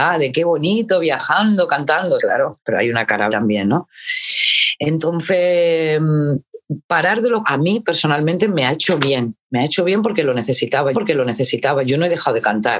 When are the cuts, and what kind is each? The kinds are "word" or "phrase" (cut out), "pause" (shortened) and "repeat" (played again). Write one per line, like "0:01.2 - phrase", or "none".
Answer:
0:02.2 - word
0:02.6 - pause
0:03.3 - word
0:07.4 - word
0:10.9 - repeat